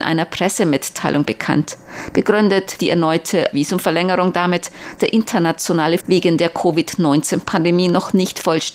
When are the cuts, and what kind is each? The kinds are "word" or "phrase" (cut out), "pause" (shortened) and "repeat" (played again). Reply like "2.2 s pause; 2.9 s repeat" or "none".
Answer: 2.8 s word; 3.5 s word; 5.0 s word; 6.0 s word